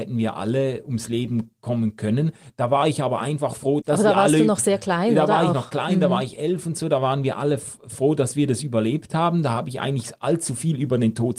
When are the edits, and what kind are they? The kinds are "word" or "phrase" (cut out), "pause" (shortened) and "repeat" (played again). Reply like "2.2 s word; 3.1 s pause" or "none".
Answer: 3.8 s word

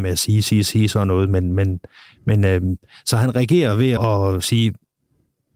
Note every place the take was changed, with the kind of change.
4.0 s word

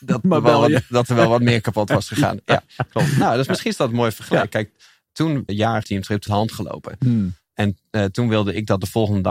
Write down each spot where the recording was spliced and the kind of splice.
5.5 s word; 5.8 s phrase; 6.3 s phrase

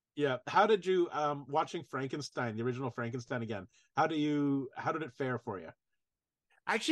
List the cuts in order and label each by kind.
none

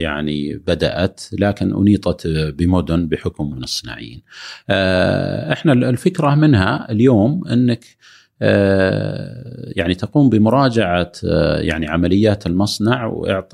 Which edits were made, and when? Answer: 3.5 s phrase

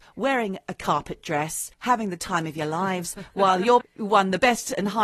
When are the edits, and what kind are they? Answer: 1.7 s pause; 3.8 s word

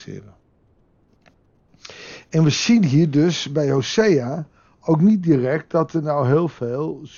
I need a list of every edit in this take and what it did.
none

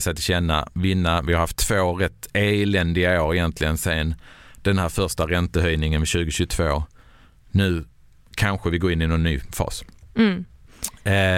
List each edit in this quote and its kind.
none

